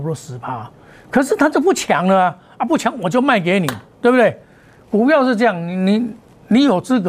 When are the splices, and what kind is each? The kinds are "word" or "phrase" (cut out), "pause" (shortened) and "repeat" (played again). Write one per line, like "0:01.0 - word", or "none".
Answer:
0:03.9 - pause